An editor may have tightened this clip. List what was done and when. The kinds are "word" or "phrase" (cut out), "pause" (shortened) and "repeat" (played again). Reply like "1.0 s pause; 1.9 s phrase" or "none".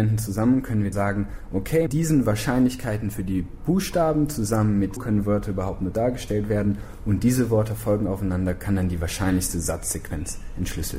0.9 s word; 1.9 s word; 5.0 s word